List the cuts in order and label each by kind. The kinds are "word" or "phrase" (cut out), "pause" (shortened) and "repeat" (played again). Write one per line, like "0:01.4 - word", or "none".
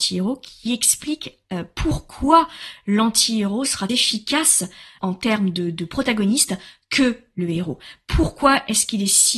0:03.9 - phrase